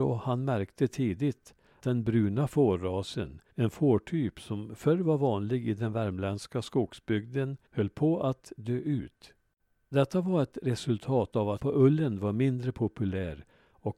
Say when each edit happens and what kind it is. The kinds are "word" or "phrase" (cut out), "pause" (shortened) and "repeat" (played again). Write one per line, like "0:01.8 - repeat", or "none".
0:01.8 - word
0:03.5 - pause
0:07.7 - pause
0:09.6 - pause
0:11.6 - word